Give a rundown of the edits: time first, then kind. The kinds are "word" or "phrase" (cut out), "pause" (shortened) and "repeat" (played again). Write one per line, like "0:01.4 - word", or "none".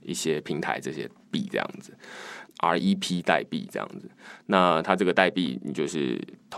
0:02.5 - phrase